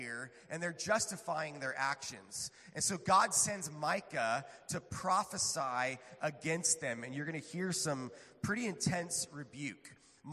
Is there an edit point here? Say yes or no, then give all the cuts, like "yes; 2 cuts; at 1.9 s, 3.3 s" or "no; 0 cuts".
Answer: no; 0 cuts